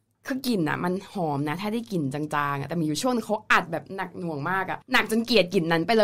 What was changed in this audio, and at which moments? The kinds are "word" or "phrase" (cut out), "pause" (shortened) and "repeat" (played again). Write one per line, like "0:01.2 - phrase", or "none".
0:04.8 - pause

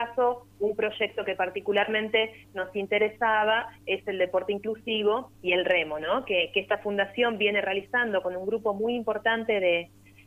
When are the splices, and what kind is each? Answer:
0:05.4 - pause

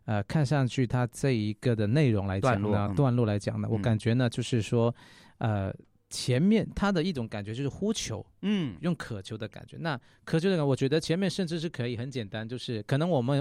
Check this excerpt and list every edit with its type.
none

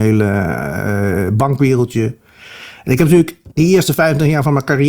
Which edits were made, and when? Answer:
0:03.5 - pause

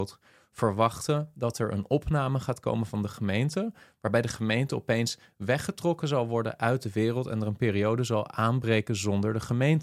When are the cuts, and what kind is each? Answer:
none

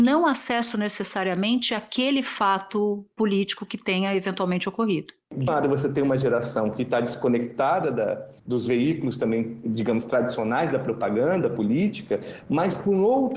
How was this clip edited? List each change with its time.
0:05.5 - word
0:08.4 - pause

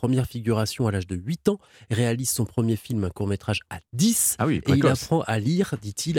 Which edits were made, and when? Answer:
none

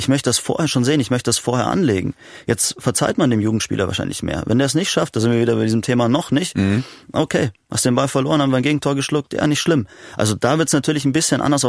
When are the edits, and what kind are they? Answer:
none

